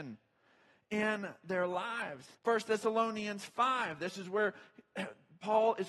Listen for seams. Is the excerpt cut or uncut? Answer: cut